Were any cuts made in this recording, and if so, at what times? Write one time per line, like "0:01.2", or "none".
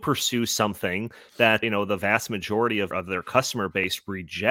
0:01.6
0:02.9

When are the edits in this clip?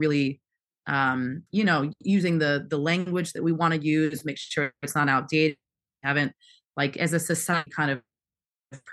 0:01.5

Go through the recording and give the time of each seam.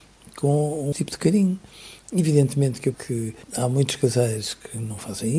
0:00.9
0:02.9
0:03.4

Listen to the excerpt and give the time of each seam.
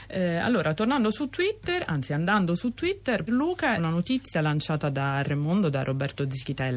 0:03.3
0:03.8
0:05.2

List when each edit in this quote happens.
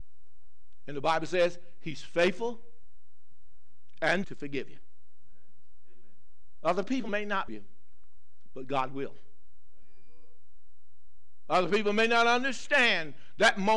0:04.2
0:07.5

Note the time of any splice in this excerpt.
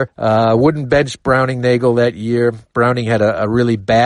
none

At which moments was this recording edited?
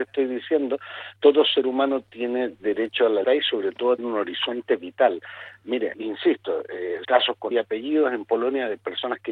0:01.2
0:03.2
0:04.0
0:05.9
0:07.0
0:07.5

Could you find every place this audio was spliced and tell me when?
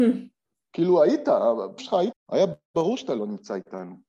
0:01.8
0:02.1

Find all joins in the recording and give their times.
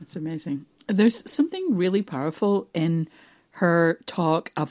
none

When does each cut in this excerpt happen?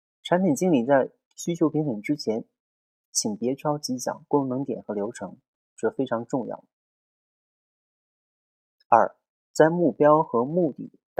0:01.3

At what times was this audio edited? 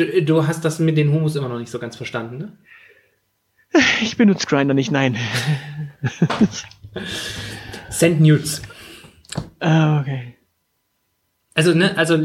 none

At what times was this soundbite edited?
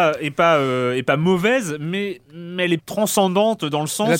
0:02.2
0:02.8

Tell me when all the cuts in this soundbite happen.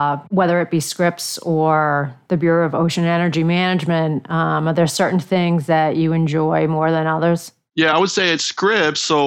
none

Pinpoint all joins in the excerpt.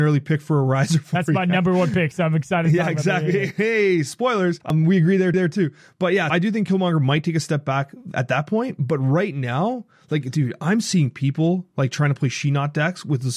0:04.6
0:05.3
0:06.3

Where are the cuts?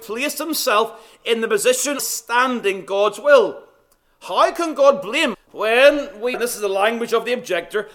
0:02.0
0:05.3
0:06.3

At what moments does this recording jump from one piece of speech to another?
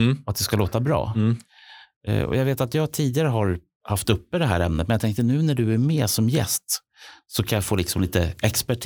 none

